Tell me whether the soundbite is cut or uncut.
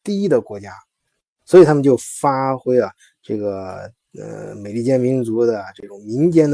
uncut